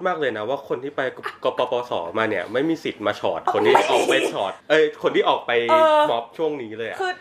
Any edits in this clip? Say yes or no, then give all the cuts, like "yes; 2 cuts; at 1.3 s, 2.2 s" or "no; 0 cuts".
yes; 1 cut; at 4.6 s